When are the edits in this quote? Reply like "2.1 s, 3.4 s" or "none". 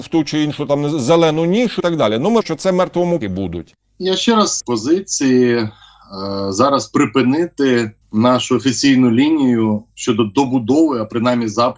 1.8 s, 2.4 s, 3.2 s, 4.6 s, 8.0 s